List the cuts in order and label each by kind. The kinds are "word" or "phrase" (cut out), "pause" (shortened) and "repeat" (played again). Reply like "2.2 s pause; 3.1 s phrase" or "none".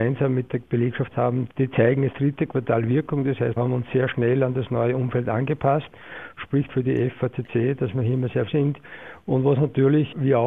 1.1 s word; 2.1 s word; 3.6 s word; 6.7 s word; 8.5 s word